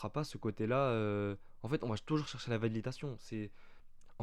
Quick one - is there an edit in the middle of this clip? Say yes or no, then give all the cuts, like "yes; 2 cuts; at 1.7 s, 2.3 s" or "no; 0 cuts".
no; 0 cuts